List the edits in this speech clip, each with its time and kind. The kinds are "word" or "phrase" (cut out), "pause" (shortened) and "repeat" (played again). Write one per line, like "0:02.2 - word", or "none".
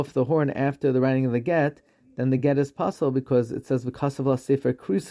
none